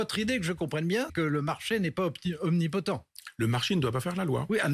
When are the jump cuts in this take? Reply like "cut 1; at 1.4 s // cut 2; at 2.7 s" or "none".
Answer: cut 1; at 1.1 s